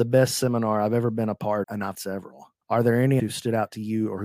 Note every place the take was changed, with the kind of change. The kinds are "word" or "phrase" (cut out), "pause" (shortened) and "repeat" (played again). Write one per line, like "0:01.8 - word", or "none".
0:01.6 - word
0:01.9 - word
0:02.6 - pause
0:03.2 - word